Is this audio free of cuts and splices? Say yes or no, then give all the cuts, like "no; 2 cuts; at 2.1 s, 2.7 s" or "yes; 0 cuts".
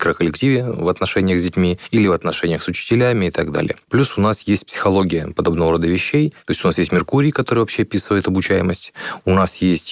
yes; 0 cuts